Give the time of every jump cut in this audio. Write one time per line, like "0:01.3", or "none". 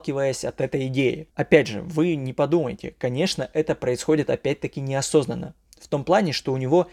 0:01.3